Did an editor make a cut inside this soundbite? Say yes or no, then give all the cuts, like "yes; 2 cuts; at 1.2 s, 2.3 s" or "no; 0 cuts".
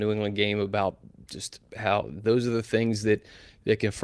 no; 0 cuts